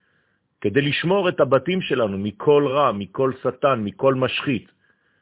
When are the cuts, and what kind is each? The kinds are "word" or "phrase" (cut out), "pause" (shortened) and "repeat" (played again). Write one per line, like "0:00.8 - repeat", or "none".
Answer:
none